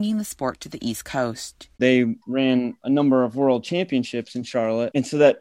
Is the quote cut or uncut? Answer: uncut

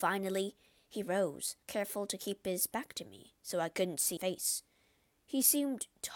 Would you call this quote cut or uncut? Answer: cut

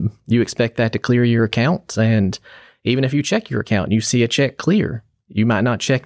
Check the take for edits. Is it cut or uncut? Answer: uncut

